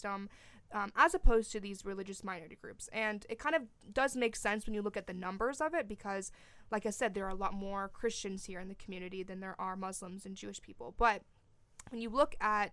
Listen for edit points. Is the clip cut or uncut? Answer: uncut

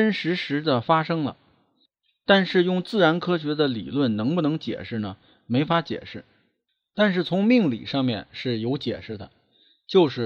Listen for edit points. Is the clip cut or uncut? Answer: uncut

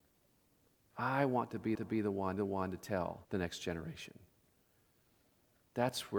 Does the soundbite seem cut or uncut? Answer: cut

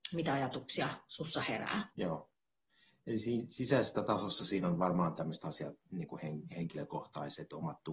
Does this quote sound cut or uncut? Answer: cut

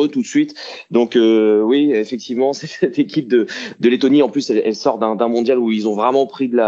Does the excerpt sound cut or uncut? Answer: uncut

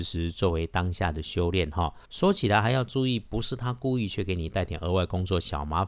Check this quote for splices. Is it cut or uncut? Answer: cut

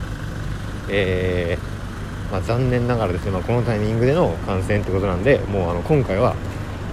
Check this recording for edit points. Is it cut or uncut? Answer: uncut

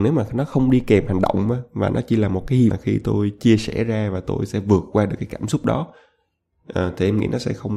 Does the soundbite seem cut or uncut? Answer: cut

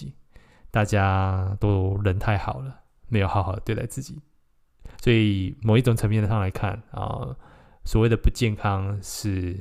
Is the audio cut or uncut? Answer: cut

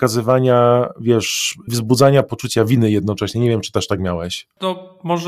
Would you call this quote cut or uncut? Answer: cut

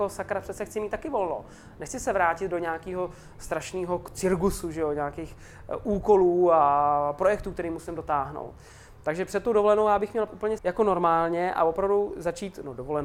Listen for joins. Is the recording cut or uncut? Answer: cut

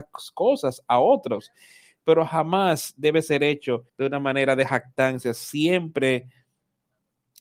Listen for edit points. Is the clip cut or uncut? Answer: cut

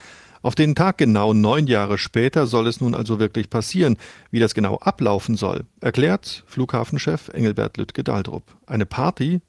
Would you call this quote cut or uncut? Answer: uncut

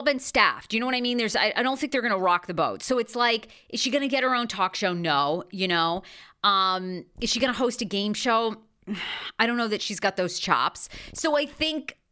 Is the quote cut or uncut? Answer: uncut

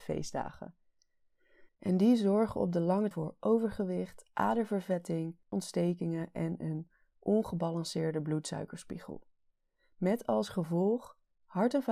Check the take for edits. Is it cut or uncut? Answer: cut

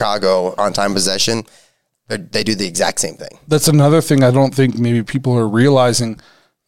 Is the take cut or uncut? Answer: uncut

